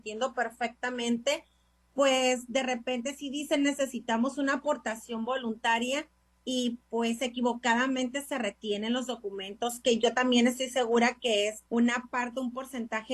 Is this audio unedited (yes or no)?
no